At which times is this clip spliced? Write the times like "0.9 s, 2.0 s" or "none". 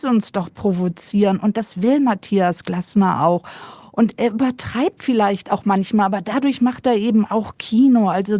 none